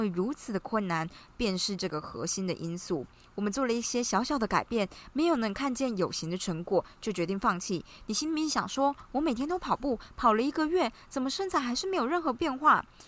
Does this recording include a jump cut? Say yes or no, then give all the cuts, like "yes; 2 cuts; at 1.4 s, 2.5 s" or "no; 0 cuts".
no; 0 cuts